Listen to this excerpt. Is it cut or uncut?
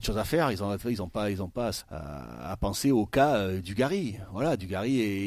cut